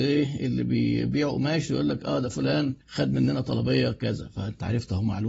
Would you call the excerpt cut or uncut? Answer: cut